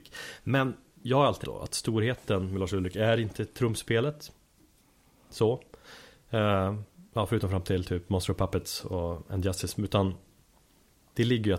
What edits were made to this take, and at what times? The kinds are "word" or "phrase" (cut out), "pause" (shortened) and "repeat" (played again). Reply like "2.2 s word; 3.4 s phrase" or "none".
1.4 s word; 7.1 s pause